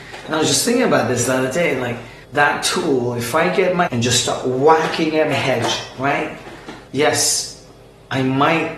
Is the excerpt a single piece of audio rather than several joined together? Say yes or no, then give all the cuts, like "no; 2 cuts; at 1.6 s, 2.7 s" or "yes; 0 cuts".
no; 4 cuts; at 2.2 s, 3.9 s, 5.3 s, 6.9 s